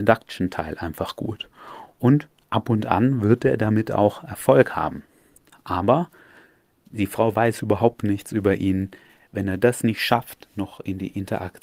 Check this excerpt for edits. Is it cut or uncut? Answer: uncut